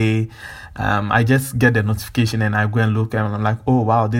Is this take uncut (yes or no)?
yes